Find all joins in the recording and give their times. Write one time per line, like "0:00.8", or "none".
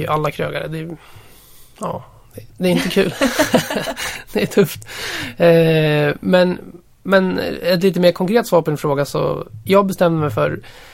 0:02.5